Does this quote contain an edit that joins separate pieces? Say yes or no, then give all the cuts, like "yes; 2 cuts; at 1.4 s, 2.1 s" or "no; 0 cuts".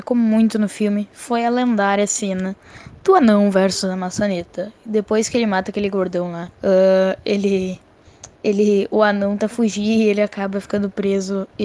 yes; 3 cuts; at 6.5 s, 8.3 s, 9.4 s